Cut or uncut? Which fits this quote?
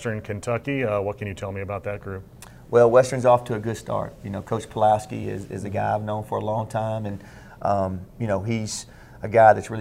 uncut